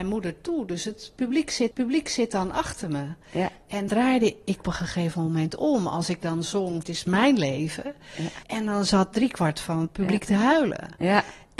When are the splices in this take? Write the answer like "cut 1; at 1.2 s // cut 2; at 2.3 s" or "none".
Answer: cut 1; at 1.7 s // cut 2; at 3.9 s // cut 3; at 4.6 s // cut 4; at 6.8 s // cut 5; at 8.4 s